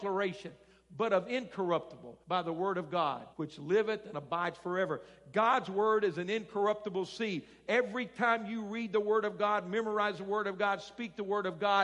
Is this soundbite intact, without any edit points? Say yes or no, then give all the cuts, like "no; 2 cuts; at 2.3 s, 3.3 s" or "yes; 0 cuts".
no; 2 cuts; at 2.2 s, 3.3 s